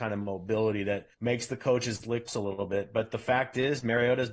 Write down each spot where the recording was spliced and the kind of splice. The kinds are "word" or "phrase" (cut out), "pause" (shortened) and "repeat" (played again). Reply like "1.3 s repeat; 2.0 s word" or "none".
1.1 s pause; 2.3 s phrase